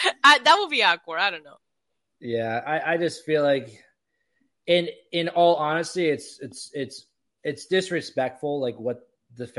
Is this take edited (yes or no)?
no